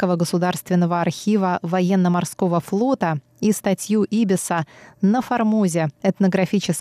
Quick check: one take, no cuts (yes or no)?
yes